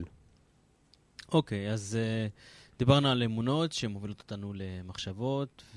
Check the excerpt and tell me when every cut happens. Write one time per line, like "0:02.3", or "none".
none